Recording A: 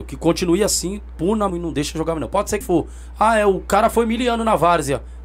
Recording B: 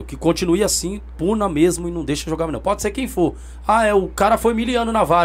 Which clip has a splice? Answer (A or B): A